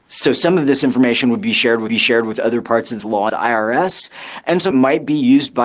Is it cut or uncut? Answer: cut